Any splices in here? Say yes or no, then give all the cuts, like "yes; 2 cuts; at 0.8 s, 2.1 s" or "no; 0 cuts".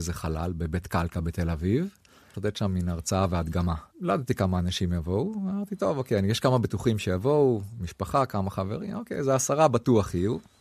yes; 2 cuts; at 2.3 s, 3.9 s